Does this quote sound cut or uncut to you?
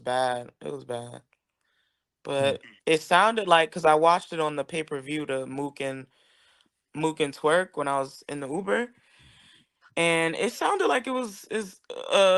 uncut